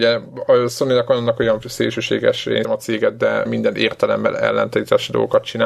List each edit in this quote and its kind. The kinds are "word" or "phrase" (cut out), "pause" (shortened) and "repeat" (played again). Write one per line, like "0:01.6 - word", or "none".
0:01.6 - word
0:02.6 - word
0:03.5 - phrase